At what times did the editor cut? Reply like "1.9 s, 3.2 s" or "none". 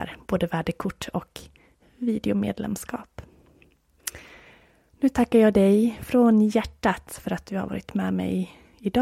none